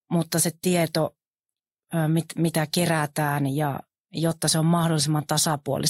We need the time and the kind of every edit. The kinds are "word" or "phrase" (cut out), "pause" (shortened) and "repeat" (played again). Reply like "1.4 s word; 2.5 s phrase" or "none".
none

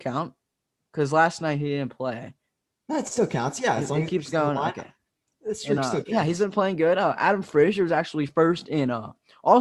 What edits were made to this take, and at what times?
none

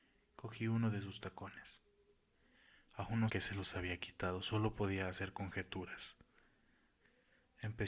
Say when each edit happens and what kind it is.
3.3 s phrase

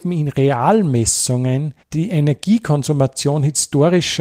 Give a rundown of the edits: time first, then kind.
1.8 s pause

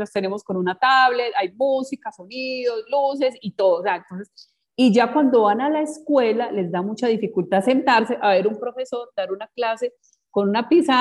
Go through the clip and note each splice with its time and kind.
none

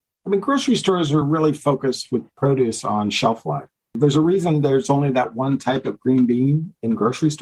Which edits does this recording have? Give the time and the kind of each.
none

